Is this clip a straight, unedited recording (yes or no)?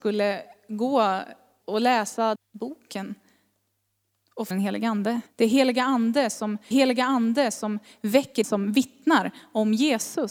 no